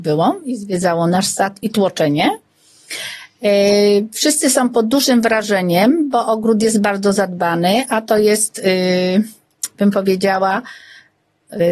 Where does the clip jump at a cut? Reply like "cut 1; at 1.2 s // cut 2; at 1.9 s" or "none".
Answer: none

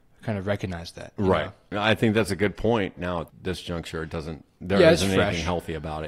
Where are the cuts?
cut 1; at 3.0 s // cut 2; at 3.3 s

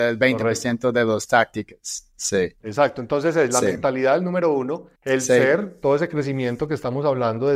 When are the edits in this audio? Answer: cut 1; at 5.0 s

